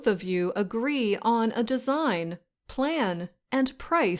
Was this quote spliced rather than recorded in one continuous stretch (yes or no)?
no